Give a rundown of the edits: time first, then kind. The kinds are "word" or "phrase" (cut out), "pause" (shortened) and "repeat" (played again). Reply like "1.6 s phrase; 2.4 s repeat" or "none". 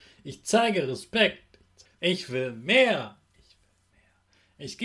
1.8 s pause